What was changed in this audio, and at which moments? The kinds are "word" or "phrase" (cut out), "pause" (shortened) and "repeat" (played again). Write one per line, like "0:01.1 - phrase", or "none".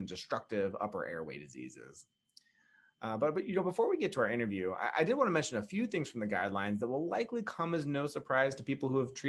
none